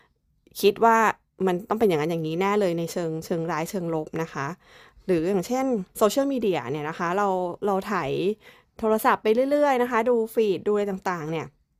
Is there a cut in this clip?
yes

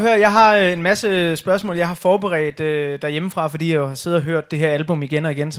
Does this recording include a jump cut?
no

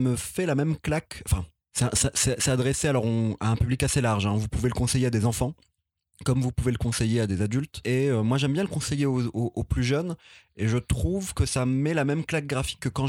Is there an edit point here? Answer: no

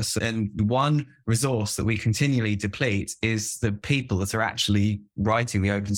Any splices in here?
no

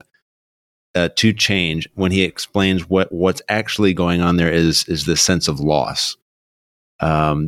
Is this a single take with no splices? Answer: yes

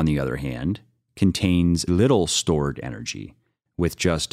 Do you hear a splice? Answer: yes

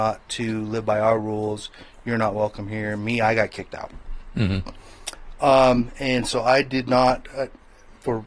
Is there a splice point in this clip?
no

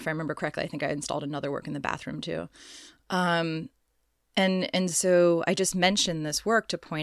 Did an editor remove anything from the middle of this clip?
no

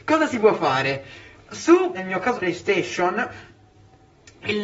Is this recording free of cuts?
no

